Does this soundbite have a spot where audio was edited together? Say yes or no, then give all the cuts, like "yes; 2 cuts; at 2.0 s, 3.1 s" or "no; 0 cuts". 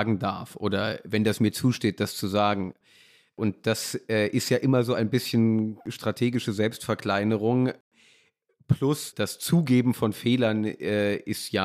no; 0 cuts